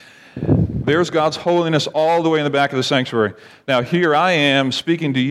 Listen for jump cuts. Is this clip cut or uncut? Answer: uncut